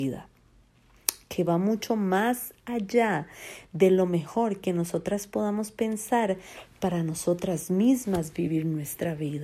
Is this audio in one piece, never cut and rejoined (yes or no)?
yes